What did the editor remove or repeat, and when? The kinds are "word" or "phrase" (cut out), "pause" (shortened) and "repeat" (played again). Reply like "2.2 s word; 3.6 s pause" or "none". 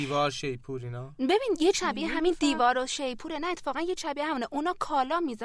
1.7 s word; 4.0 s word